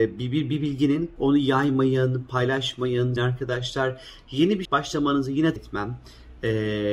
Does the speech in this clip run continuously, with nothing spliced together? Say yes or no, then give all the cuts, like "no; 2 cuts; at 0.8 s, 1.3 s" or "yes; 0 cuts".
no; 4 cuts; at 1.2 s, 3.2 s, 4.6 s, 5.6 s